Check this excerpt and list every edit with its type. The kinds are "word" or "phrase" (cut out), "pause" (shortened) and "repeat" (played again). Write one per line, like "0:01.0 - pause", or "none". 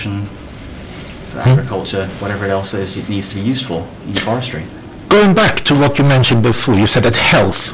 none